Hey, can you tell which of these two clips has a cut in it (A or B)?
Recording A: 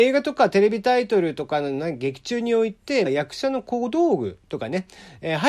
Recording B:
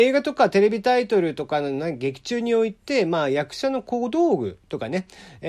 A